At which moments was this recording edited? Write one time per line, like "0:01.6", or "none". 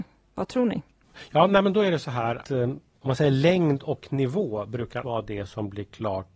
0:02.4
0:05.0